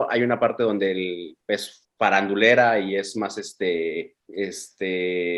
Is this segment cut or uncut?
cut